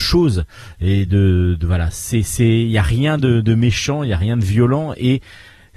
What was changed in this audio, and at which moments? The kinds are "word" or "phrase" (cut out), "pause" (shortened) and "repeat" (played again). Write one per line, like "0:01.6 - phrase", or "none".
none